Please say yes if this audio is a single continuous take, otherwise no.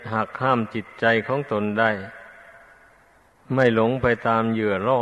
yes